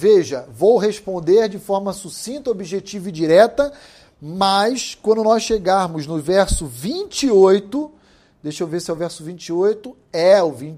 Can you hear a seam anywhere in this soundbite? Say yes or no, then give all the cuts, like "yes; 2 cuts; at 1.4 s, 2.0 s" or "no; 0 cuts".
no; 0 cuts